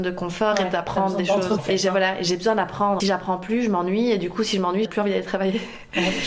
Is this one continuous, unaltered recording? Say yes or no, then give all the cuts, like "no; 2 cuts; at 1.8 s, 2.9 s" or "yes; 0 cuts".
no; 3 cuts; at 1.6 s, 3.0 s, 4.8 s